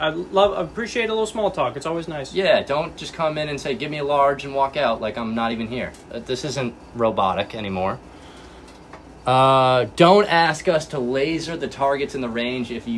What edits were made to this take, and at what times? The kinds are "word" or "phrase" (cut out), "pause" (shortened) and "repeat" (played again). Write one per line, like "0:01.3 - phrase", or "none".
none